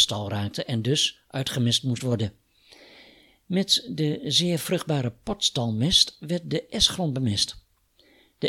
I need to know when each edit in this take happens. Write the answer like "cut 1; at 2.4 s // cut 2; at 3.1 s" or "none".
none